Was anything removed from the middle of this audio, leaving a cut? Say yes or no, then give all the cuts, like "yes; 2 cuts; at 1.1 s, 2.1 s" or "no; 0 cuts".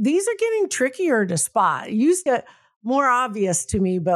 yes; 1 cut; at 2.3 s